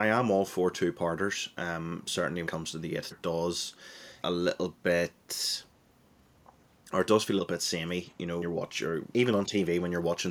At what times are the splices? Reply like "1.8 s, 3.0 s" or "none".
2.5 s, 3.1 s, 4.2 s, 7.4 s, 8.4 s, 9.1 s